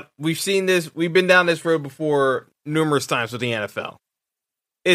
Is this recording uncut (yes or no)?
yes